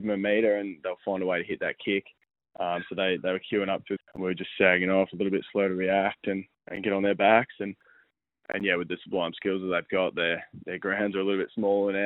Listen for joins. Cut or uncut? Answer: cut